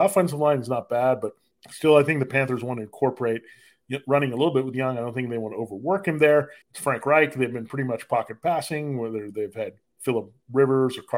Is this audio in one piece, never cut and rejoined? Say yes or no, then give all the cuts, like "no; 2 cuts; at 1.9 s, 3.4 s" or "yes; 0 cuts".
no; 2 cuts; at 1.5 s, 6.6 s